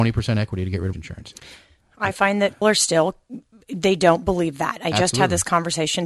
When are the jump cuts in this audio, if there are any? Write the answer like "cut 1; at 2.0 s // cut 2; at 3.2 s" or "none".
cut 1; at 0.9 s // cut 2; at 2.6 s